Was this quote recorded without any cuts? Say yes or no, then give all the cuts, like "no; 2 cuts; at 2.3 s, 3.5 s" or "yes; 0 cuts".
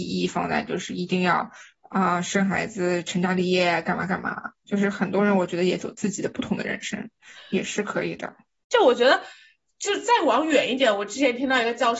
yes; 0 cuts